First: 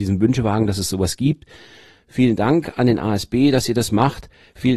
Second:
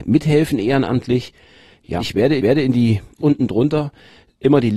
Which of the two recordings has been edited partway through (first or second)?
second